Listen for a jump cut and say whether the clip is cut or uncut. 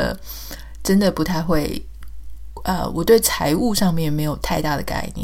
uncut